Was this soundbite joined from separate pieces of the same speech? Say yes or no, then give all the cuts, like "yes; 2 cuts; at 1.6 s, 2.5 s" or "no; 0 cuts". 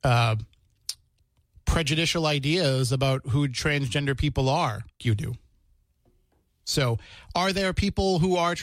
yes; 1 cut; at 5.0 s